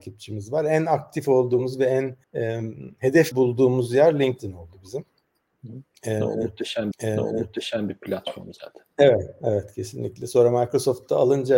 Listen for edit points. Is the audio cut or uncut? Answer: cut